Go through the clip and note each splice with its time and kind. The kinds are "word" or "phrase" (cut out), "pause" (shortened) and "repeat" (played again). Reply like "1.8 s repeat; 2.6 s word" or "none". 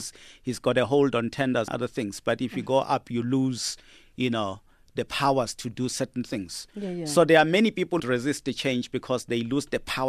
1.7 s word; 8.0 s word